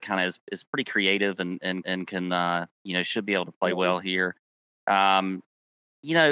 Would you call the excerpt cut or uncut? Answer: cut